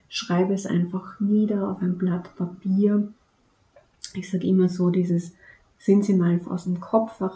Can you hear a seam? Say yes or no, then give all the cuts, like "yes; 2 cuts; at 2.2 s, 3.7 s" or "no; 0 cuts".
no; 0 cuts